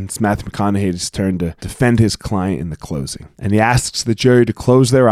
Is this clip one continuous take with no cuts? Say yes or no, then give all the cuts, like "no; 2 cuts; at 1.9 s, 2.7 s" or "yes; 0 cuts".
no; 2 cuts; at 1.6 s, 3.3 s